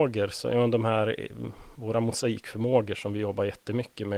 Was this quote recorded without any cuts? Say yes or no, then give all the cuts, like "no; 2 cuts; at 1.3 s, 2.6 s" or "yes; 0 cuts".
yes; 0 cuts